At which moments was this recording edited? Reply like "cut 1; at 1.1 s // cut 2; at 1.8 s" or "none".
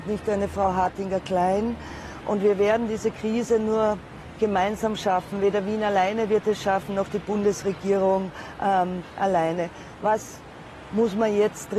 none